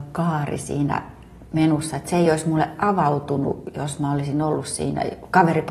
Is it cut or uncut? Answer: uncut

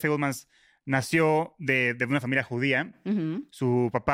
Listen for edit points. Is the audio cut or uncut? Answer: uncut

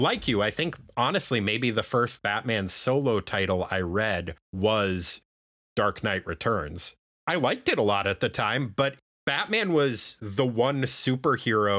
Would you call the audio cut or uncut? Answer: uncut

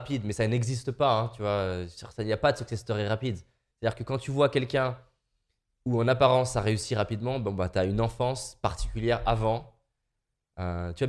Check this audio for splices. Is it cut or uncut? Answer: uncut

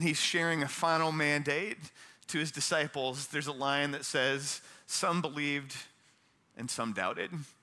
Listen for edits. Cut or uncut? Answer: uncut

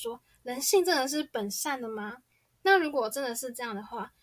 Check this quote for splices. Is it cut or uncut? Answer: uncut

